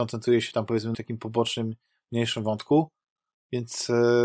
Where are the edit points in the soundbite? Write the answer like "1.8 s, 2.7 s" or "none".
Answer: 0.9 s